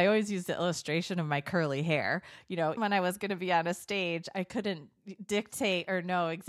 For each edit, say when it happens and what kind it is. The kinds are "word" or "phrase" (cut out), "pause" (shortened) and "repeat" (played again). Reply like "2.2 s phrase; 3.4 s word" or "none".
2.8 s word